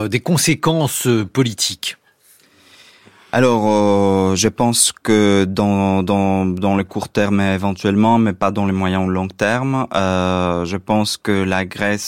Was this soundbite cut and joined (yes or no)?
no